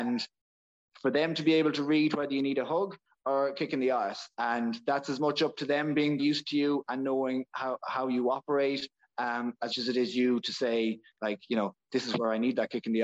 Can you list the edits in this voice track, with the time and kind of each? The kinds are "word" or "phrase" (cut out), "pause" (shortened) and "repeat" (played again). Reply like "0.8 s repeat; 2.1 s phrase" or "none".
6.2 s word; 9.7 s word